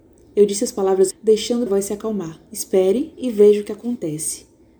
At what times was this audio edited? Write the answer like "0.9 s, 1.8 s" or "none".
1.1 s, 1.7 s, 2.5 s